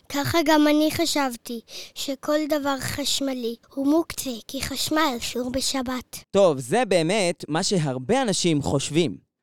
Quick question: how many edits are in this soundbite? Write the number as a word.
two